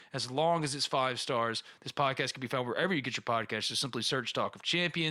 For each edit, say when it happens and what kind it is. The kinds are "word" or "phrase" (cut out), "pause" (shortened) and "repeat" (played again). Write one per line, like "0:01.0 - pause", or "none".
none